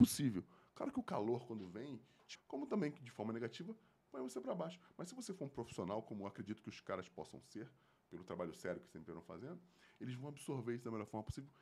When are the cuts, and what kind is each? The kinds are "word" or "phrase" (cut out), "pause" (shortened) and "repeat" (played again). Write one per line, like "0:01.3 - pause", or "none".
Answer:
0:02.3 - phrase